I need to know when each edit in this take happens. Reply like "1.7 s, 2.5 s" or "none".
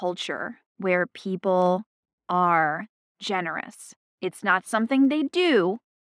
none